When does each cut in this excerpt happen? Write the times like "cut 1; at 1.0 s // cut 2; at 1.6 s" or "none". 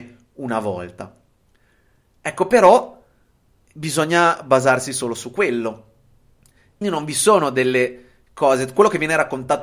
cut 1; at 6.8 s